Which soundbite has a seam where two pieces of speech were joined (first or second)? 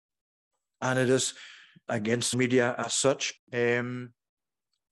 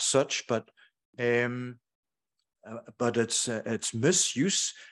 first